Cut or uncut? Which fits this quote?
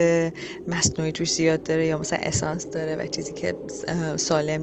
uncut